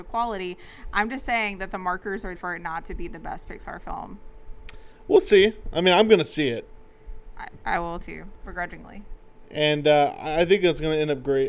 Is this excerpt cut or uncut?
cut